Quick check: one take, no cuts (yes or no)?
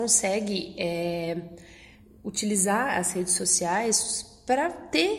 yes